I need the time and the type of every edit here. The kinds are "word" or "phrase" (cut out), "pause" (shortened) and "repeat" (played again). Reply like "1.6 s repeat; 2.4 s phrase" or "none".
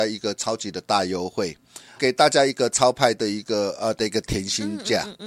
2.0 s word

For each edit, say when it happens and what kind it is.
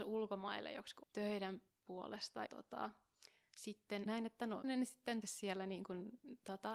1.0 s word; 2.5 s word; 4.1 s word; 4.6 s word; 5.2 s word

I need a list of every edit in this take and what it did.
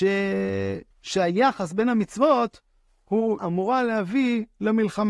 0.9 s pause; 3.4 s word

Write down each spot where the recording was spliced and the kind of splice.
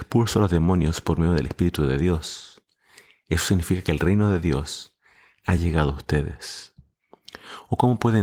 none

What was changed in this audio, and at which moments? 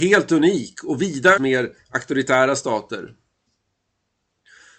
1.4 s phrase

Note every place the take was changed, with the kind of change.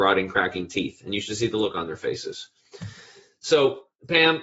none

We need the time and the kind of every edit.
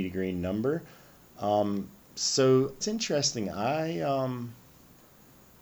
2.8 s word

